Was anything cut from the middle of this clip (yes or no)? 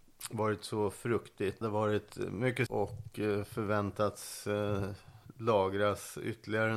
yes